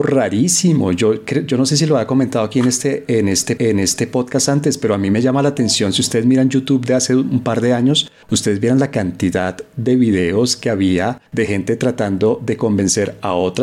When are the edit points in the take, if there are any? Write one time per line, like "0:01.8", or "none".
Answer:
0:03.6
0:08.2
0:11.3